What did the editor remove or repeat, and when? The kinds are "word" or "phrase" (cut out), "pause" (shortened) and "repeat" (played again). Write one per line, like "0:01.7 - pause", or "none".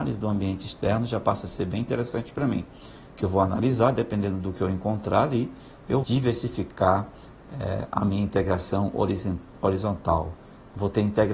0:06.0 - phrase